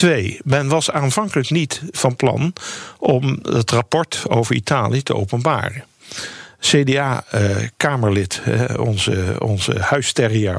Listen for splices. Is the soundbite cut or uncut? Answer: uncut